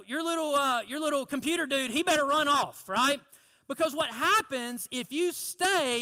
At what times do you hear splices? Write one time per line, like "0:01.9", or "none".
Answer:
none